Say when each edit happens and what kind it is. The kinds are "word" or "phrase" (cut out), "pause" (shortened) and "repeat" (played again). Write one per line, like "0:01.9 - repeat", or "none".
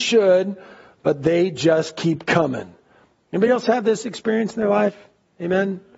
none